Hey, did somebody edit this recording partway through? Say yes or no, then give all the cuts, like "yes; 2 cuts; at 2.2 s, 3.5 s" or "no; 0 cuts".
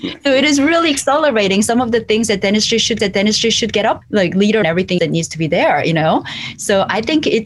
yes; 4 cuts; at 3.0 s, 4.0 s, 4.6 s, 5.0 s